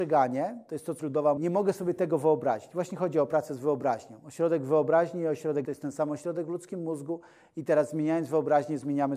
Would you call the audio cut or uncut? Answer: cut